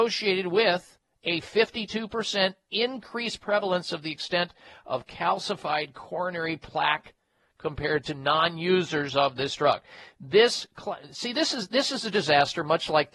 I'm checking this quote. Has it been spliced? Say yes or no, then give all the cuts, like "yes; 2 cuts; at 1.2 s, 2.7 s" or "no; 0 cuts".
no; 0 cuts